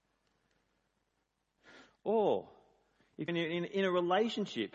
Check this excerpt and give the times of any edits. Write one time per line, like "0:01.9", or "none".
0:03.3